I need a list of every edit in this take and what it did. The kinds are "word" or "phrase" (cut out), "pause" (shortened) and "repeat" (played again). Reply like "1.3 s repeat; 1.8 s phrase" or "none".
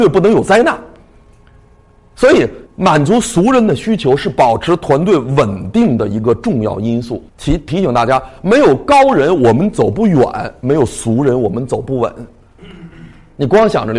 2.7 s pause; 7.3 s pause